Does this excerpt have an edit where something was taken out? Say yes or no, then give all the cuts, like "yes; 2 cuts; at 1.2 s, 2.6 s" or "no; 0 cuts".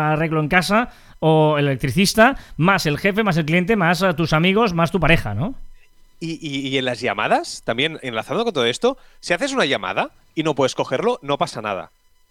no; 0 cuts